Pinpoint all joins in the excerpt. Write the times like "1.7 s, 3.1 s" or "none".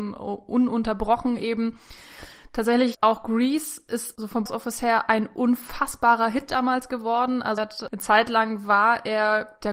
4.5 s, 7.6 s